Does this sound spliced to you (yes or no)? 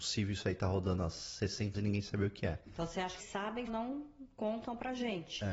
yes